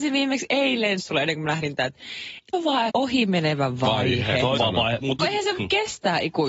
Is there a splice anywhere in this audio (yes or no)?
yes